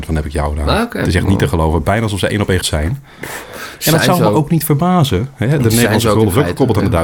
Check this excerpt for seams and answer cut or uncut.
cut